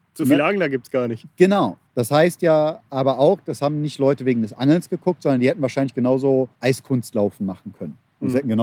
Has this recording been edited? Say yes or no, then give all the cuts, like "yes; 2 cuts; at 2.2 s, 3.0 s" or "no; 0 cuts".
yes; 2 cuts; at 1.9 s, 6.5 s